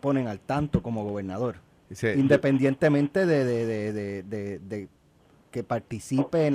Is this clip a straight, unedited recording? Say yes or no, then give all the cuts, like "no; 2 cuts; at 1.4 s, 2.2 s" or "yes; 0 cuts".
yes; 0 cuts